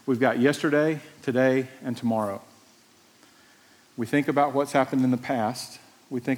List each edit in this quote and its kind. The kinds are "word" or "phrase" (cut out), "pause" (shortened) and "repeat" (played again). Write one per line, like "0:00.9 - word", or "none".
none